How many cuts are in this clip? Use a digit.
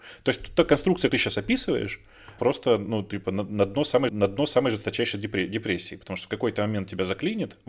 3